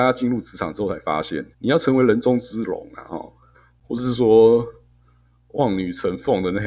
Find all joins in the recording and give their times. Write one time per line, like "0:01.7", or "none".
0:01.5
0:03.5